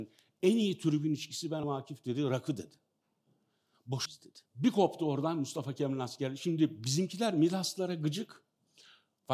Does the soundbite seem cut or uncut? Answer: cut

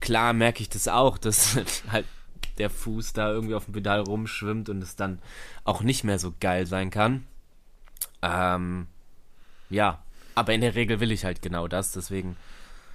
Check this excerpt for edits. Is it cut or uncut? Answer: uncut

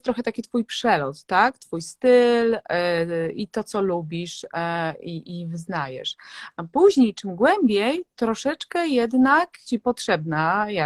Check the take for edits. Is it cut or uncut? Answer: cut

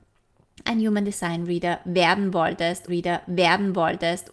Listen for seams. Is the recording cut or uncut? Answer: cut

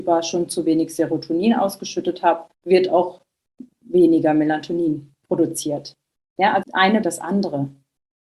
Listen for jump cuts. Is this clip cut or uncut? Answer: cut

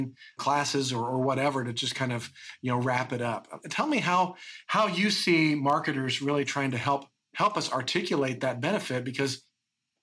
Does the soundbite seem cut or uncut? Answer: uncut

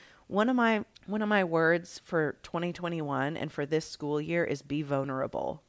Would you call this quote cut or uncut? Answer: cut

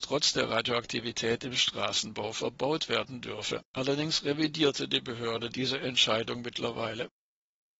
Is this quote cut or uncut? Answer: cut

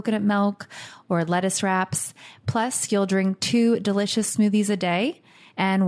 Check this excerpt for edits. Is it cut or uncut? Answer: uncut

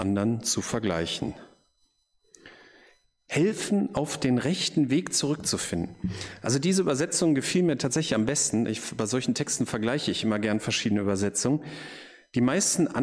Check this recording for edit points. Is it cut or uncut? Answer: uncut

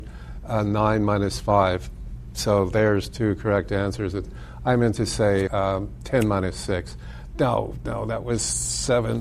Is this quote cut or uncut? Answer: cut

